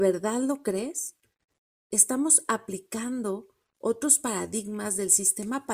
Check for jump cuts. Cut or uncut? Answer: uncut